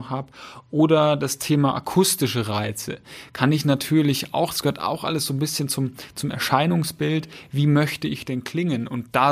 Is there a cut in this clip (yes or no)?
no